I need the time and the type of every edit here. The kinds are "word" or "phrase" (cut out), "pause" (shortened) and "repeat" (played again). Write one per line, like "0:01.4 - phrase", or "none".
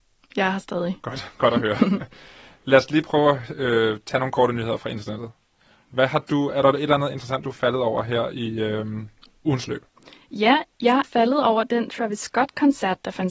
0:11.0 - word